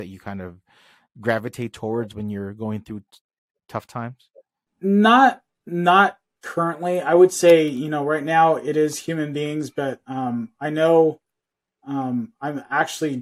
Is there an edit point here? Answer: no; 0 cuts

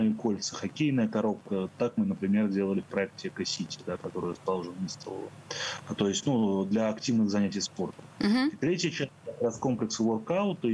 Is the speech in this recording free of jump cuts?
yes; 0 cuts

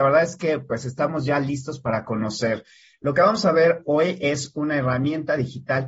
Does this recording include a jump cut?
no; 0 cuts

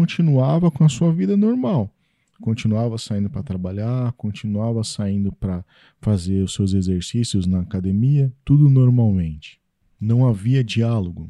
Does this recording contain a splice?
no; 0 cuts

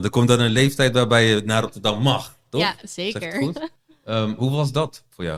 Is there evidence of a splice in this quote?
yes; 1 cut; at 3.8 s

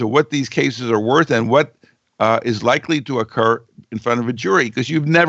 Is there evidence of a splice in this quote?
no; 0 cuts

